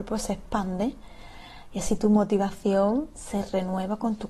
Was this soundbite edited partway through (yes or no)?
no